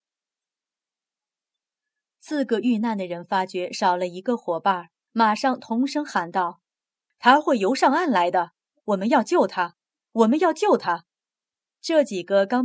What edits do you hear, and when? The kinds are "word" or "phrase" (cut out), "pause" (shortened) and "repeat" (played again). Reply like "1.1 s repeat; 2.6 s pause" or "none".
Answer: 11.1 s pause